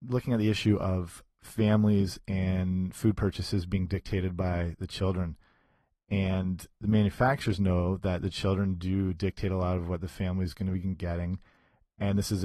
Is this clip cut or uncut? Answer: uncut